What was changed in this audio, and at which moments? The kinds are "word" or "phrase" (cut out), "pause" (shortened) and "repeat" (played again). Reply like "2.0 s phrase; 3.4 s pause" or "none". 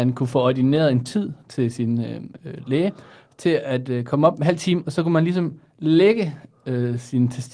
none